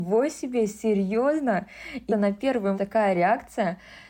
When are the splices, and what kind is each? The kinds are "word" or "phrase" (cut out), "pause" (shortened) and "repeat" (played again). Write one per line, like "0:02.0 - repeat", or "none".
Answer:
0:02.1 - word
0:02.8 - phrase

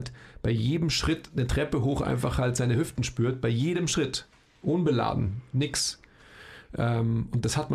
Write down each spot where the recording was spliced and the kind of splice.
none

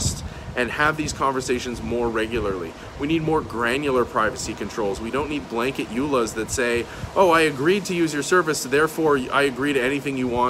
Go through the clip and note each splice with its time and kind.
0:05.4 - word

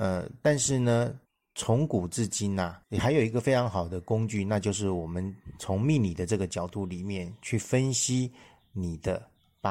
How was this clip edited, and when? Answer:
0:01.2 - pause
0:02.8 - pause

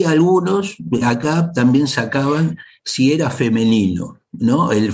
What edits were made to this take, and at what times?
0:01.0 - word

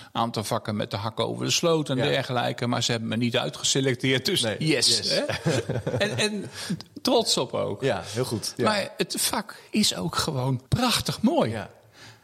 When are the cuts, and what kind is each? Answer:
0:10.7 - pause

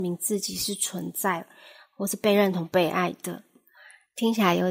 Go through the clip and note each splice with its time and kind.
none

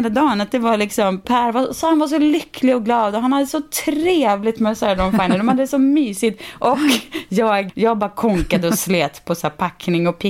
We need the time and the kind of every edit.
0:07.7 - word

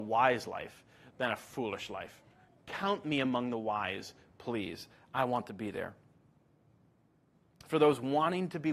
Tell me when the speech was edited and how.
none

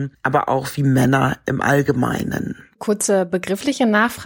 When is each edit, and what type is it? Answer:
none

